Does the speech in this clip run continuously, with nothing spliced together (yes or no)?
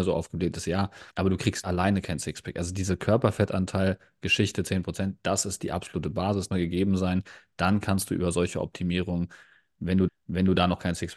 no